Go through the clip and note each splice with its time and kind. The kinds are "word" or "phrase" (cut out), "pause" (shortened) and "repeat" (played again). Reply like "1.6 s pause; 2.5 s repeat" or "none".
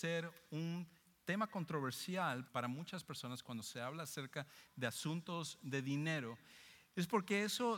2.5 s word